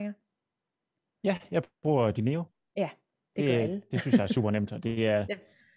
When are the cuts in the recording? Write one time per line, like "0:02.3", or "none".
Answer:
none